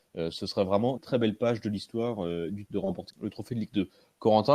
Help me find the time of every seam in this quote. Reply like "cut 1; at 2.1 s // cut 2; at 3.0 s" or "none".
cut 1; at 1.0 s // cut 2; at 2.7 s // cut 3; at 3.1 s